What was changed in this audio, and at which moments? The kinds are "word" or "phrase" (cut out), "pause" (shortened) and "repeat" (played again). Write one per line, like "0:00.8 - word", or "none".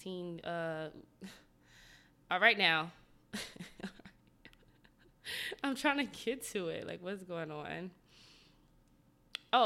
none